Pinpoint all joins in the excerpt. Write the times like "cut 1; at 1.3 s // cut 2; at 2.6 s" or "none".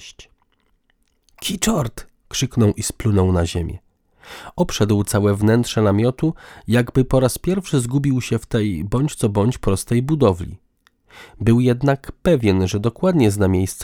none